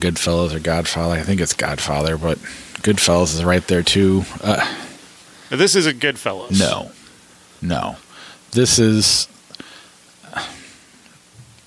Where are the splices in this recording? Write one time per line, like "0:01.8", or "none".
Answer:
none